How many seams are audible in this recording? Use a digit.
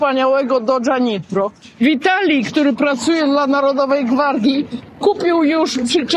0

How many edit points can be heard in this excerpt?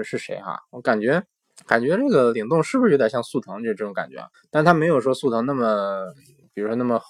2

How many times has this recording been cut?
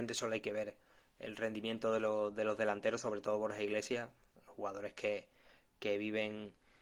0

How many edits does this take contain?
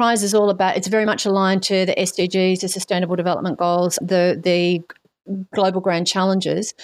1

